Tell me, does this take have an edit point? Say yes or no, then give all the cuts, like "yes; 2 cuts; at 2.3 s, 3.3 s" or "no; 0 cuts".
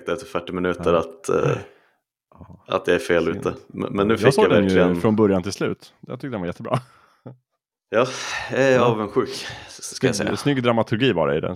no; 0 cuts